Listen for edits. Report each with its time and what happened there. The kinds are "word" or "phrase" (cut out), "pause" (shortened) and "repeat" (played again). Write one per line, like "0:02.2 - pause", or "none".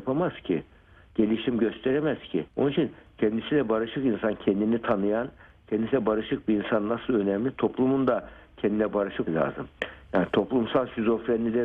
0:02.5 - pause
0:09.3 - word